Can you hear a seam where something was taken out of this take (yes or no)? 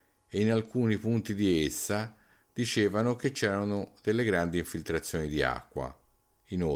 no